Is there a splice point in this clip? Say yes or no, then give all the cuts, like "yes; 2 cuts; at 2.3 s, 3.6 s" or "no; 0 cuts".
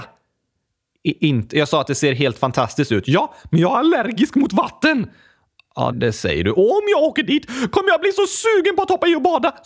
yes; 1 cut; at 5.9 s